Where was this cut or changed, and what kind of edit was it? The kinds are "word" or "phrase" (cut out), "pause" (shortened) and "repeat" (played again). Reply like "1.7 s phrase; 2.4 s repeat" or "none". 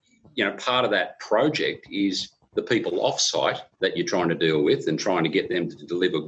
3.7 s pause